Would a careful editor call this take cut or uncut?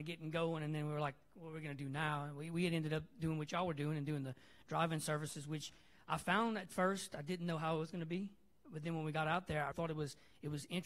cut